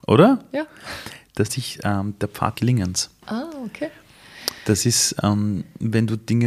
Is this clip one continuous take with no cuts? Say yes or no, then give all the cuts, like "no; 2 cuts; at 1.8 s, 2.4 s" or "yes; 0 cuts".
no; 2 cuts; at 1.5 s, 2.6 s